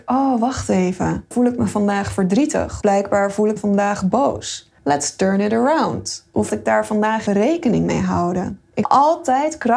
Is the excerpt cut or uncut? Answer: cut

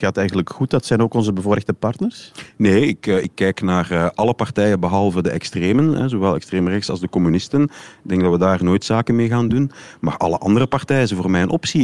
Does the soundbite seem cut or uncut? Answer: uncut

